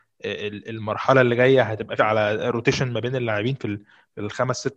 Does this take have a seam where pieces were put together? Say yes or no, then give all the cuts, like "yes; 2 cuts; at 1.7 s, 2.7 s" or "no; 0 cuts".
yes; 1 cut; at 2.0 s